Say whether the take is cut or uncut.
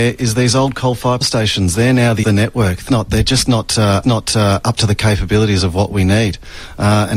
cut